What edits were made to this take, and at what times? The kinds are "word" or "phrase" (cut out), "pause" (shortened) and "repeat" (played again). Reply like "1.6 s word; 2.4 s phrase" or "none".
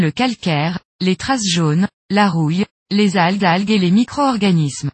3.4 s repeat